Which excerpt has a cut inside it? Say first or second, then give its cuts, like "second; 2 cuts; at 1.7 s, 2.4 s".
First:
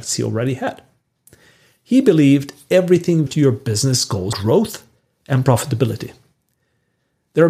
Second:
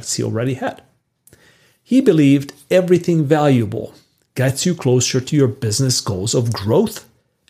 first; 2 cuts; at 3.3 s, 4.3 s